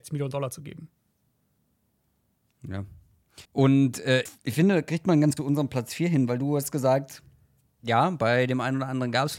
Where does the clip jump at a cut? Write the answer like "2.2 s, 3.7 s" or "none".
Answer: 3.4 s, 4.3 s, 5.4 s